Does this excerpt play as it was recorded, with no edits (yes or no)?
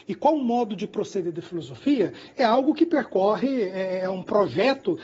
yes